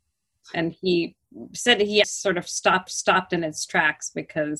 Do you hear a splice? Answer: yes; 2 cuts; at 2.0 s, 2.9 s

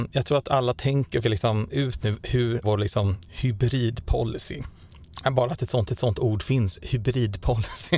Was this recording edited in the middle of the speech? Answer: yes; 5 cuts; at 1.2 s, 1.7 s, 2.0 s, 2.6 s, 5.9 s

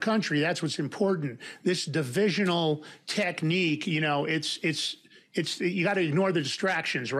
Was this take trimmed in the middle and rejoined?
no; 0 cuts

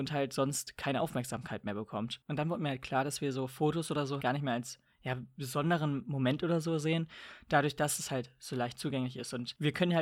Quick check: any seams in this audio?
yes; 1 cut; at 4.2 s

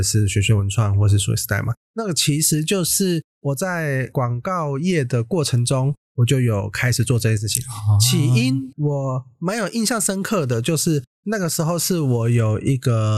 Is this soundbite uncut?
yes; 0 cuts

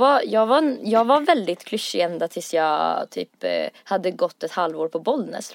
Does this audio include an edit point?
no; 0 cuts

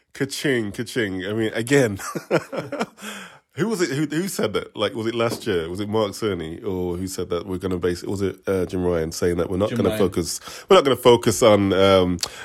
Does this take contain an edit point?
yes; 1 cut; at 8.4 s

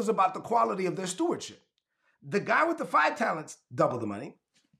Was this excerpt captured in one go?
yes; 0 cuts

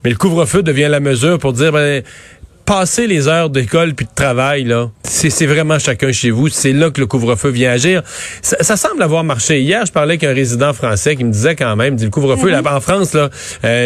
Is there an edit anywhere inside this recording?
yes; 1 cut; at 5.0 s

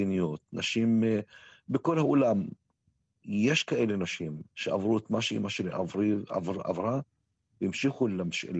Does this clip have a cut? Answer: no; 0 cuts

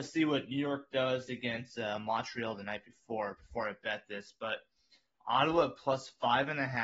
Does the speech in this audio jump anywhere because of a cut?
no; 0 cuts

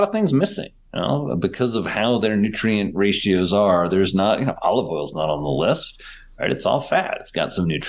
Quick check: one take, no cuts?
yes; 0 cuts

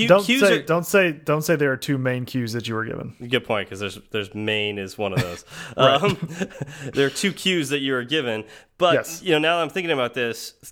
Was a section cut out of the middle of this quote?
no; 0 cuts

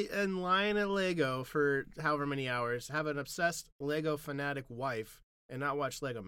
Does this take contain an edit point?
no; 0 cuts

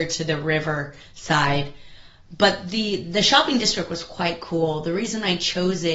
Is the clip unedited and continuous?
yes; 0 cuts

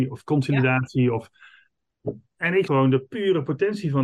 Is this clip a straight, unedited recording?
no; 2 cuts; at 2.3 s, 2.7 s

